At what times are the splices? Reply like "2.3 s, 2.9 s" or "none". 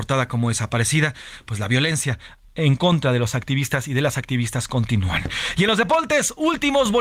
none